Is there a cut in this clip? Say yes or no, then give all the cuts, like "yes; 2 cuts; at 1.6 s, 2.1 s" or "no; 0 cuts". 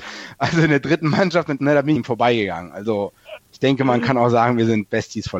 yes; 2 cuts; at 1.6 s, 2.0 s